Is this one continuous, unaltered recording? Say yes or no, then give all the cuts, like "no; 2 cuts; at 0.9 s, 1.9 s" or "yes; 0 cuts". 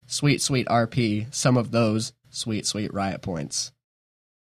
yes; 0 cuts